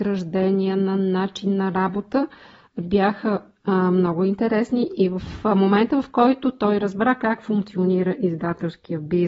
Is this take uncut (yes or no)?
yes